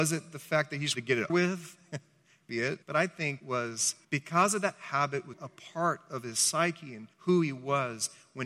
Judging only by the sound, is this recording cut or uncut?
cut